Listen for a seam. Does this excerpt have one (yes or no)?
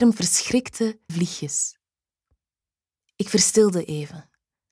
yes